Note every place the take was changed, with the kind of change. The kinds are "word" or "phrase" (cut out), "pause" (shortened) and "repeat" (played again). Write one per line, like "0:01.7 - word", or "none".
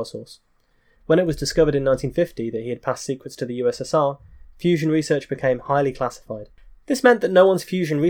none

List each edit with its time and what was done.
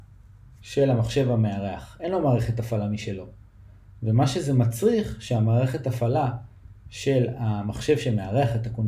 none

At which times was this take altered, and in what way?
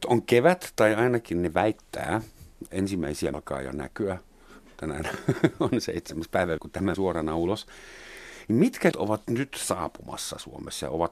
0:02.7 - word
0:03.3 - word
0:06.6 - word
0:06.9 - word
0:08.9 - word
0:09.2 - word

